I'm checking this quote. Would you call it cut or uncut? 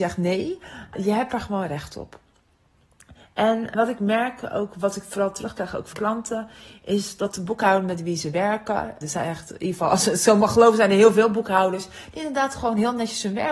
cut